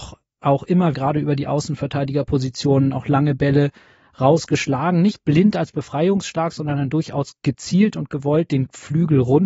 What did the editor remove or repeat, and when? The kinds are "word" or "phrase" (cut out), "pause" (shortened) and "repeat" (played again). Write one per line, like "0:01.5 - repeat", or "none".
0:00.9 - word